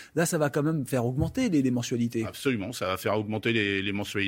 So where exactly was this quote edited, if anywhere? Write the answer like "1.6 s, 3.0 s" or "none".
none